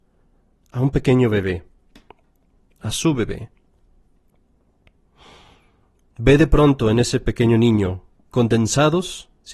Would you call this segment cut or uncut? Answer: uncut